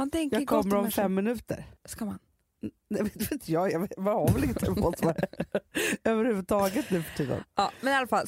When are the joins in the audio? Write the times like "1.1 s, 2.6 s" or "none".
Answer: 1.8 s